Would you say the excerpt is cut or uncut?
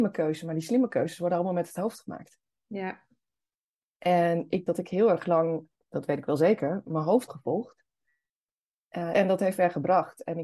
cut